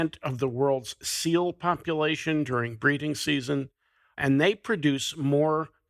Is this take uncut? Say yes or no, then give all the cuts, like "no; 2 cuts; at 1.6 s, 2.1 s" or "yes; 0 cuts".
yes; 0 cuts